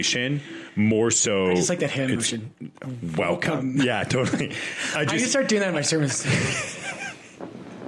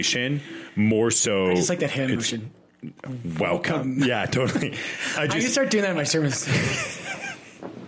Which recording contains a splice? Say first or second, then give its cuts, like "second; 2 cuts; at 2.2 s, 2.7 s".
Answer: first; 1 cut; at 2.5 s